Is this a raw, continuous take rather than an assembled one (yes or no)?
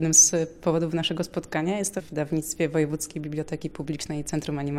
no